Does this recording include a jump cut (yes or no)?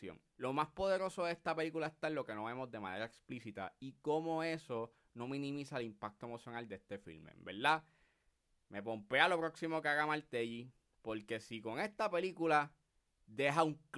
no